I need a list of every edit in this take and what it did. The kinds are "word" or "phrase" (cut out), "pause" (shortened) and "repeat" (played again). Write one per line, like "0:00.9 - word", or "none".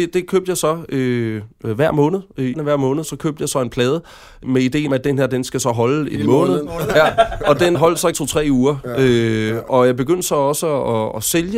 0:02.5 - word
0:03.0 - word
0:04.4 - word
0:04.9 - word
0:07.7 - word
0:08.1 - word
0:09.7 - word